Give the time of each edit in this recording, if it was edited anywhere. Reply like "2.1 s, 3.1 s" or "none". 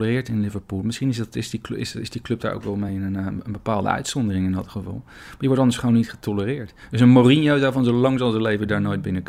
none